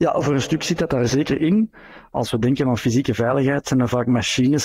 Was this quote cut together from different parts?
no; 0 cuts

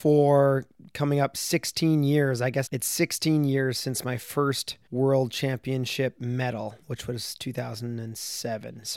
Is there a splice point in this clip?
yes; 3 cuts; at 2.7 s, 4.9 s, 6.8 s

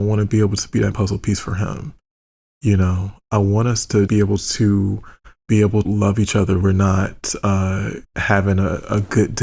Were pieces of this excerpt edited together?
yes; 6 cuts; at 0.9 s, 4.1 s, 5.4 s, 5.8 s, 6.6 s, 8.0 s

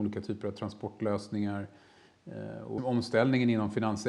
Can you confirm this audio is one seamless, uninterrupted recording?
no; 1 cut; at 2.8 s

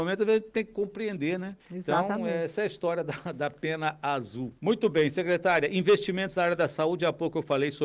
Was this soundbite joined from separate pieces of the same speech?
yes; 2 cuts; at 1.6 s, 4.6 s

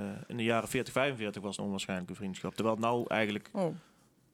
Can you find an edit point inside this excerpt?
yes; 1 cut; at 1.6 s

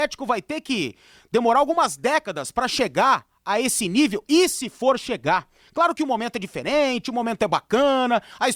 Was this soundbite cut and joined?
no; 0 cuts

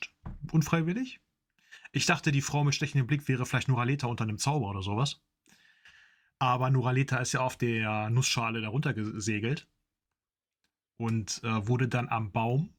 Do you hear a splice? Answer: no; 0 cuts

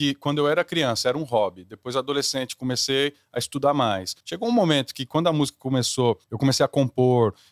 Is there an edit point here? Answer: yes; 2 cuts; at 4.2 s, 6.2 s

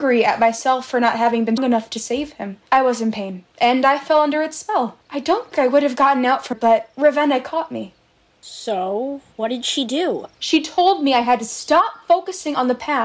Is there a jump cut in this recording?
yes; 9 cuts; at 1.6 s, 2.7 s, 3.5 s, 5.0 s, 5.5 s, 6.5 s, 6.9 s, 9.3 s, 10.3 s

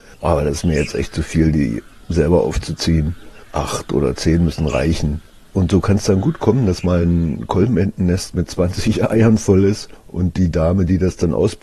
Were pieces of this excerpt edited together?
no; 0 cuts

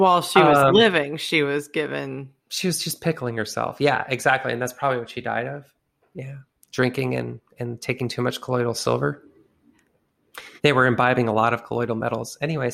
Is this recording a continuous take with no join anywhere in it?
no; 3 cuts; at 2.4 s, 6.5 s, 10.6 s

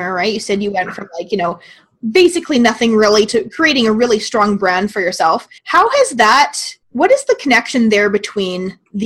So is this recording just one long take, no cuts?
no; 3 cuts; at 3.3 s, 5.6 s, 6.8 s

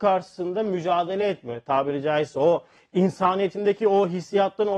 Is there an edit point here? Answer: no; 0 cuts

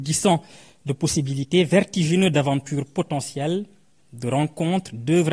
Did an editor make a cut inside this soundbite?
no; 0 cuts

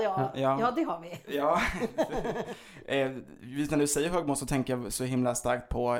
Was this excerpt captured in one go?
yes; 0 cuts

